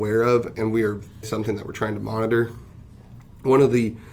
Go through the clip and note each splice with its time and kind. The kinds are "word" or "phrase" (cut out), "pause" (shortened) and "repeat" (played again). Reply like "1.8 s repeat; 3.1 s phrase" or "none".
1.2 s word